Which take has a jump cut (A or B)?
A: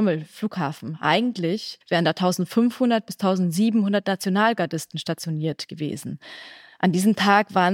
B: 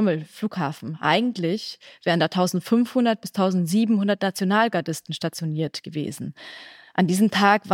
A